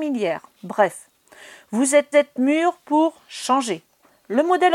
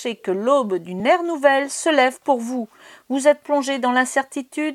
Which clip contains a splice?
first; 1 cut; at 2.1 s

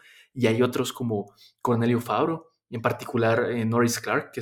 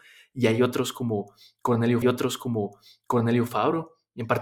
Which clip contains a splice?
second; 1 cut; at 2.0 s

